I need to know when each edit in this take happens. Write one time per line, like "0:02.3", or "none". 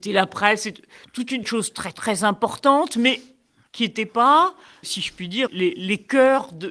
0:01.4
0:04.8
0:05.5